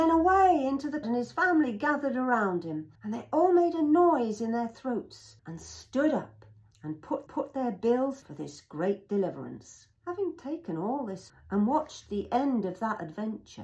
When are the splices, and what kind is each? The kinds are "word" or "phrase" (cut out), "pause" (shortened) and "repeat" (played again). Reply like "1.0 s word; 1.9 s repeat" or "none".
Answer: 1.0 s word; 3.0 s pause; 5.4 s pause; 7.3 s repeat; 8.2 s phrase; 10.0 s pause; 11.3 s word